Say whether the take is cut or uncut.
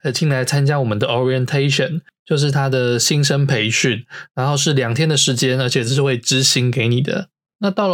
uncut